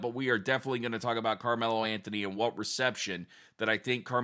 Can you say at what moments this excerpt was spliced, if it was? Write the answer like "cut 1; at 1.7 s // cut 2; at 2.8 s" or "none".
none